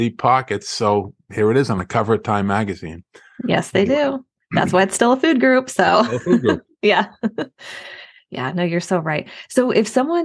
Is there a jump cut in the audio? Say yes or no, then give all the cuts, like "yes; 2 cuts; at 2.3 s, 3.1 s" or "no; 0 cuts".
no; 0 cuts